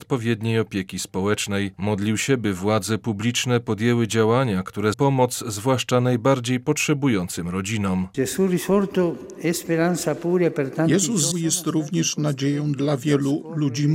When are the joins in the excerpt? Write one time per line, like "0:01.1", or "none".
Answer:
0:01.7
0:04.9
0:11.3